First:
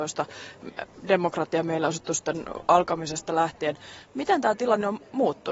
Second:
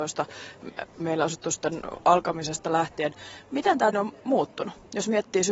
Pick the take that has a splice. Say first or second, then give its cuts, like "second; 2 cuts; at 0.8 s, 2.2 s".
second; 2 cuts; at 1.0 s, 3.9 s